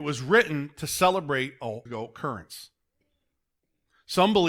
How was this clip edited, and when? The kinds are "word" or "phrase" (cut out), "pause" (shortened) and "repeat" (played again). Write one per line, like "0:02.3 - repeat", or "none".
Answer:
0:01.9 - phrase